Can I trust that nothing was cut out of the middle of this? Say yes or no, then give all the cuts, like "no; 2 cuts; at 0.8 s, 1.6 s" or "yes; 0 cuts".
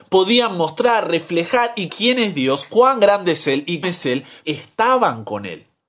no; 3 cuts; at 1.9 s, 3.8 s, 4.4 s